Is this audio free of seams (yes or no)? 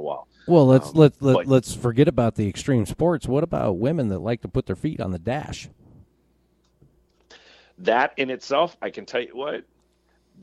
yes